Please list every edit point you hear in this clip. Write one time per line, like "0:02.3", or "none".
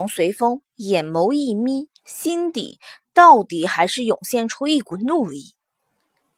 0:02.0